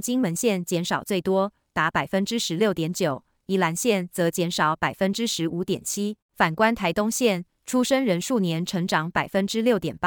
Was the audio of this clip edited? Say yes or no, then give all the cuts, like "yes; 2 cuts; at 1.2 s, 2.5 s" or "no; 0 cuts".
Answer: yes; 1 cut; at 6.2 s